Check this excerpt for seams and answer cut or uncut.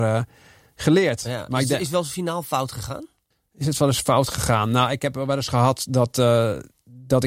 cut